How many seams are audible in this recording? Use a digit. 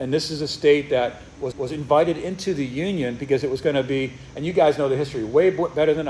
1